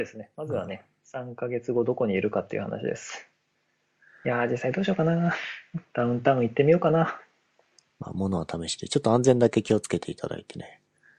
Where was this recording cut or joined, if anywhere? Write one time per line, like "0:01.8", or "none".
none

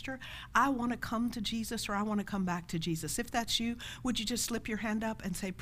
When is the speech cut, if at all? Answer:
none

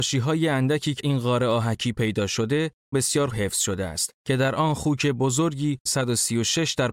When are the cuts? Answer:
0:01.0
0:02.9
0:03.3
0:04.2
0:05.9

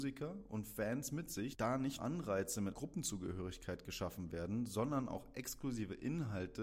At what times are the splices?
0:02.0
0:02.7

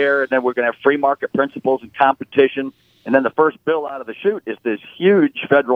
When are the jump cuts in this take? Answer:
none

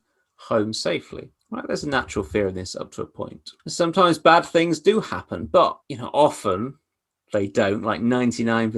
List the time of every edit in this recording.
0:01.4
0:03.6
0:05.8

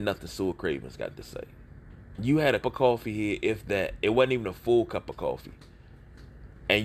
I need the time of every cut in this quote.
0:02.6

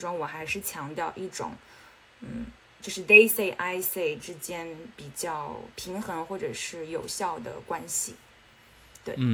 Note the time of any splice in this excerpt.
none

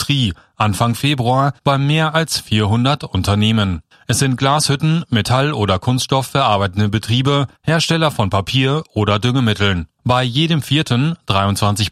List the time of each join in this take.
0:01.6
0:03.9
0:07.6
0:10.0

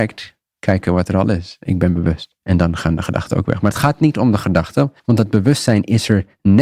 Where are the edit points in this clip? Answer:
0:02.4
0:05.0

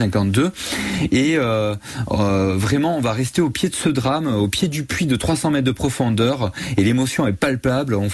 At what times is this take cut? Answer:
none

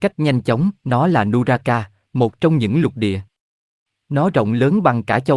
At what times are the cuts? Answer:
none

